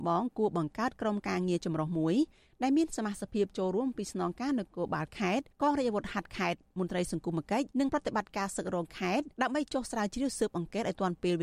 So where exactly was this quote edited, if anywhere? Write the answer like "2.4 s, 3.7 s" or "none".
5.5 s, 7.7 s, 9.3 s